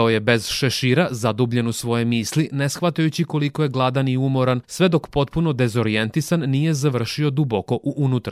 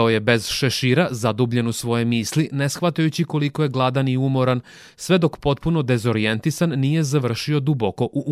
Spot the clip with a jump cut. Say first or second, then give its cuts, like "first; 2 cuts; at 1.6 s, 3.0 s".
first; 1 cut; at 4.6 s